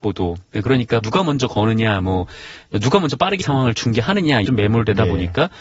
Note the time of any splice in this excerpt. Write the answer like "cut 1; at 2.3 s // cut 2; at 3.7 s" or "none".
cut 1; at 1.0 s // cut 2; at 3.4 s // cut 3; at 4.5 s